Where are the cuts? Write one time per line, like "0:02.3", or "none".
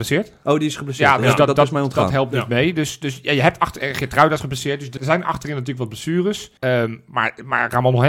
0:05.0
0:06.6